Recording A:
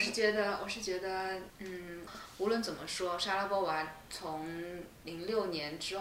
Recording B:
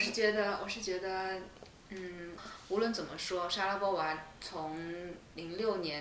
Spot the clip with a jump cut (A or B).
A